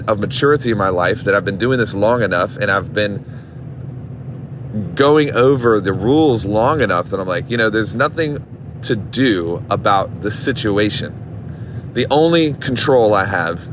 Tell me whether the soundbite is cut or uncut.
uncut